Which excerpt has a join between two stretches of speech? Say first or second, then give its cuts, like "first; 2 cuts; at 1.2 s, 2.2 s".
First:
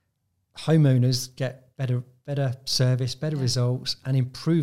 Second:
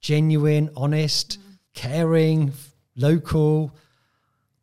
second; 1 cut; at 1.7 s